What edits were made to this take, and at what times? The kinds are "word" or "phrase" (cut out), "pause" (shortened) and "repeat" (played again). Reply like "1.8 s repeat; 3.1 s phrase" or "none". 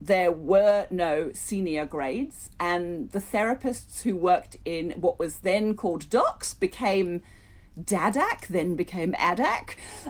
none